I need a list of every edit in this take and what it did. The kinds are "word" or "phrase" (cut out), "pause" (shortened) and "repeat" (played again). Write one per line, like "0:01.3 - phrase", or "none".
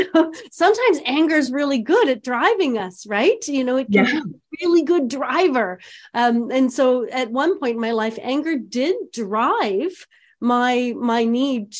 none